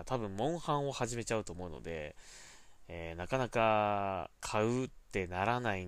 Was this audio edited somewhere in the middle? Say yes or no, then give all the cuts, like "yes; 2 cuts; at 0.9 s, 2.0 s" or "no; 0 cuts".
yes; 1 cut; at 4.4 s